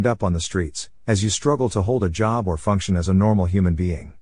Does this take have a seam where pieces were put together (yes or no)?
no